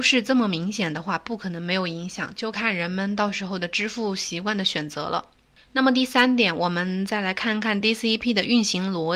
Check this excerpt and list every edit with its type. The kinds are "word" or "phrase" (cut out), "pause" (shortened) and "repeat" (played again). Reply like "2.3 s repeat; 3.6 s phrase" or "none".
none